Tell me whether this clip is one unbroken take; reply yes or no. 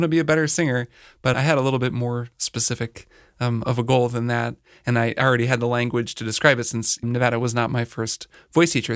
no